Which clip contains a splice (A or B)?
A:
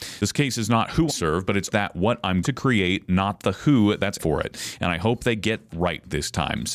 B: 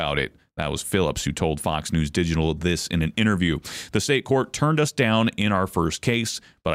A